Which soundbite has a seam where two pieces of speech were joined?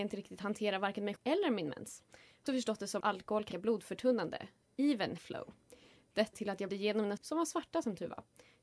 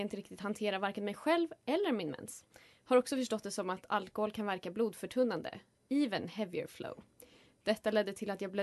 first; 8 cuts; at 1.2 s, 2.5 s, 3.0 s, 3.5 s, 5.2 s, 6.3 s, 6.7 s, 7.2 s

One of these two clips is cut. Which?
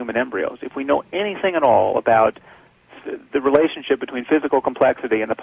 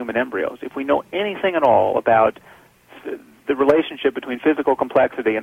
first; 1 cut; at 3.3 s

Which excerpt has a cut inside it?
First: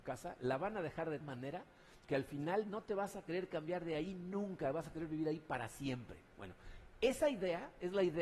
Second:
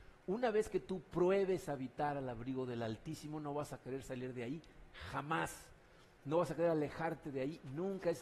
first; 1 cut; at 1.2 s

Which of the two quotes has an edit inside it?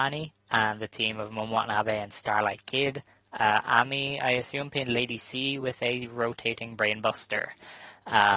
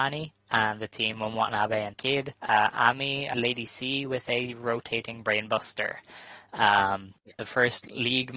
second; 5 cuts; at 1.1 s, 1.9 s, 2.4 s, 3.3 s, 7.2 s

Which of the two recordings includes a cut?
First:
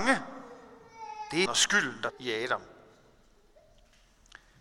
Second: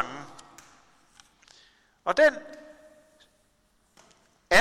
first; 2 cuts; at 1.5 s, 2.1 s

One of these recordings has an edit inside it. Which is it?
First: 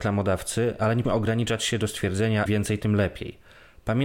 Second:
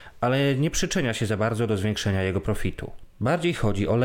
first; 2 cuts; at 1.0 s, 2.5 s

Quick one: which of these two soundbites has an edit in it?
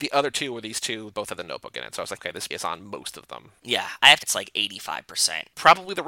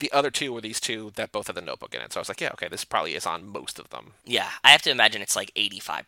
first; 4 cuts; at 1.1 s, 2.2 s, 2.5 s, 4.2 s

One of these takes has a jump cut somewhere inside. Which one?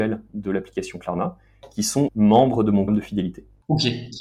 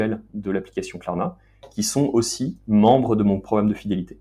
first; 2 cuts; at 2.1 s, 2.9 s

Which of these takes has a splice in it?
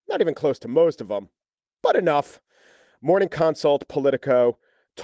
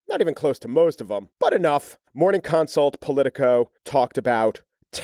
second; 3 cuts; at 1.3 s, 2.1 s, 3.8 s

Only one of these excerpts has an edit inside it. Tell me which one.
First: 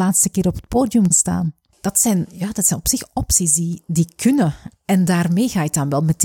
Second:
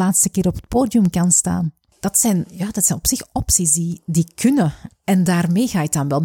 first; 1 cut; at 1.1 s

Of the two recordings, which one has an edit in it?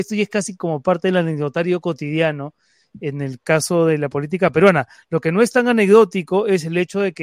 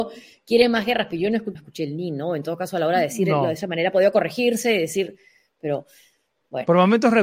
second; 1 cut; at 1.5 s

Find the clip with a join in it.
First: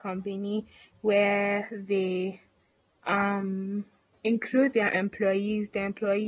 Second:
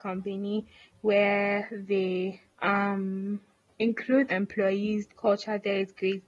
second; 3 cuts; at 2.5 s, 4.3 s, 5.1 s

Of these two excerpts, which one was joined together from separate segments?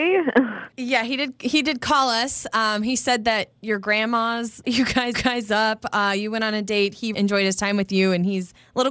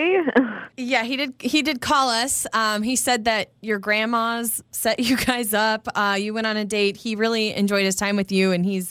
first; 3 cuts; at 4.6 s, 5.1 s, 7.1 s

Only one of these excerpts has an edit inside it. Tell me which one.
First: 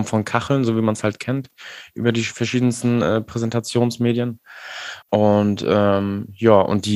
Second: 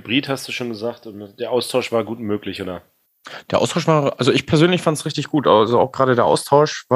first; 1 cut; at 5.0 s

